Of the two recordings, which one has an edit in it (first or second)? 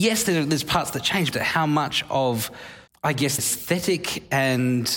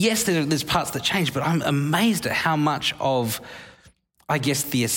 first